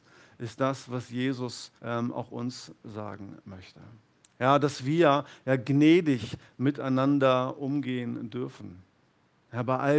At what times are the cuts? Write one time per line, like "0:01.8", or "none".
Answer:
0:01.8
0:04.2